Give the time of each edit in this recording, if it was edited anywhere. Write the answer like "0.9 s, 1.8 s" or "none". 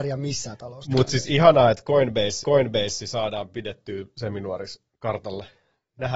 2.4 s